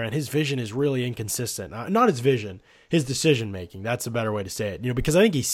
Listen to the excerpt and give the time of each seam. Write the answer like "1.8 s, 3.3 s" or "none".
none